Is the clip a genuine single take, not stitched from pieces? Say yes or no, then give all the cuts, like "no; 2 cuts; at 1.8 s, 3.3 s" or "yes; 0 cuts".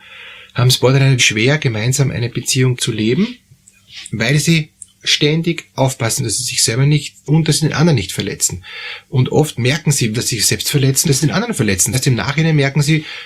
no; 7 cuts; at 1.2 s, 2.8 s, 6.2 s, 7.2 s, 10.1 s, 11.0 s, 11.9 s